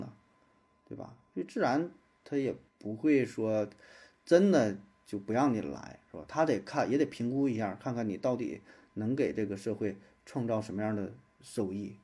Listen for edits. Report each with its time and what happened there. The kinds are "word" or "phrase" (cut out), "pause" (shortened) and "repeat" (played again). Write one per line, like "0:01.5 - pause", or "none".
0:02.7 - pause